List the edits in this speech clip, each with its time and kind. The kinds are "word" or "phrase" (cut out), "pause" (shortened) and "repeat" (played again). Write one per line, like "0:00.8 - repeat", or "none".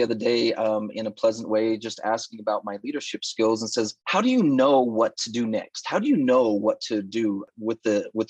0:04.0 - pause